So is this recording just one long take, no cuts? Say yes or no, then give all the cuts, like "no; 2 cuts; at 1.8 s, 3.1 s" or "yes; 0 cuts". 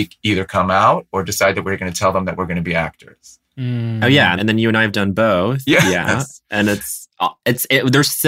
no; 1 cut; at 4.4 s